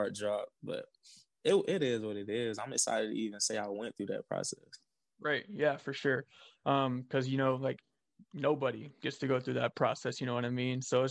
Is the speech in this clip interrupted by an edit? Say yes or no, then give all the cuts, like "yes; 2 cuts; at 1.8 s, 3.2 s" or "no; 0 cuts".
no; 0 cuts